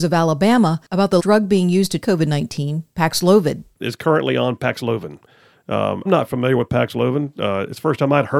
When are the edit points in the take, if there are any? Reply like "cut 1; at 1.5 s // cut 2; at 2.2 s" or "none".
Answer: cut 1; at 1.2 s // cut 2; at 2.0 s // cut 3; at 3.8 s // cut 4; at 6.1 s